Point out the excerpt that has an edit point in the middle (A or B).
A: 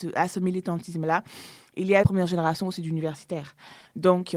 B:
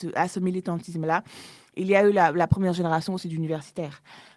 A